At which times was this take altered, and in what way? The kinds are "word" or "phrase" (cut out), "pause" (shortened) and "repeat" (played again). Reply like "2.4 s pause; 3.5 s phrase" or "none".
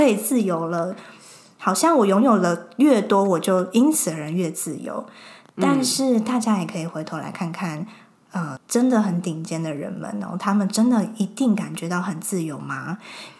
8.6 s word